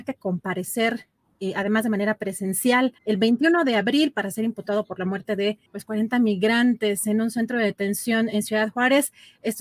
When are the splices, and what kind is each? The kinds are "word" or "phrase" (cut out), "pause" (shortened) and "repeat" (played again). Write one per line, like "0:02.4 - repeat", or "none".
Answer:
0:03.0 - pause
0:05.7 - pause